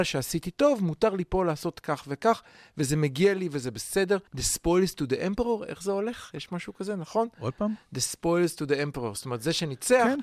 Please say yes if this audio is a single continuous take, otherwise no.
no